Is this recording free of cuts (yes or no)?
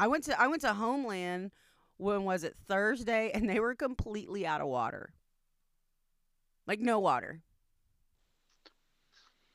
yes